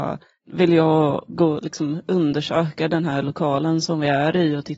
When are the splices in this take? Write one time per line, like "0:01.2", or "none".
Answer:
none